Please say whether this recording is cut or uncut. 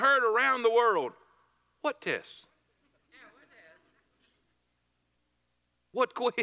uncut